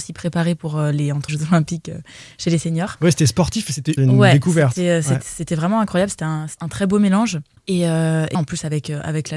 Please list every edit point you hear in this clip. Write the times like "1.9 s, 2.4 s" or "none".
1.3 s, 4.0 s, 6.6 s, 8.3 s